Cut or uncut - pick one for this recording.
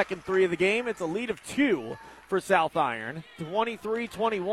uncut